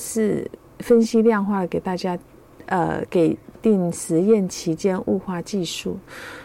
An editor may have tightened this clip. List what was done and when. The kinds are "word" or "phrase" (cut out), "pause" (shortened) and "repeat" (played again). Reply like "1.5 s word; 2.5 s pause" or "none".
none